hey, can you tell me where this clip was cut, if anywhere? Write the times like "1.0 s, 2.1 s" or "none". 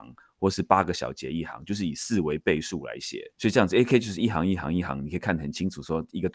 3.3 s